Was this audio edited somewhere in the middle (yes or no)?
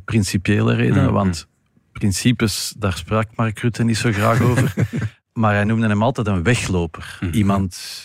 no